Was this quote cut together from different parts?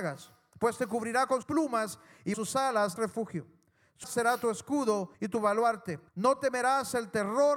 yes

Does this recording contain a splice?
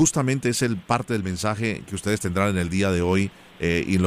no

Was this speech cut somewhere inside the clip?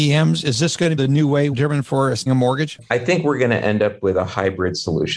yes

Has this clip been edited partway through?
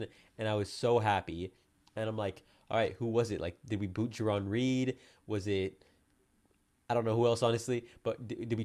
no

